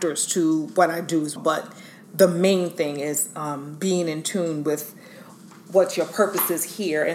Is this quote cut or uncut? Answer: cut